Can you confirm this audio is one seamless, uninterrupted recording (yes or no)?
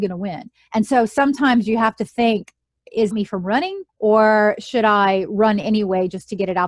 no